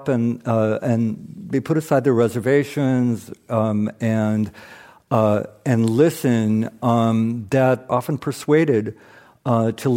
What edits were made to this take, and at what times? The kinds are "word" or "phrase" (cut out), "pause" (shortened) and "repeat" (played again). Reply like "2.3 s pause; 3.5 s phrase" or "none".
7.9 s word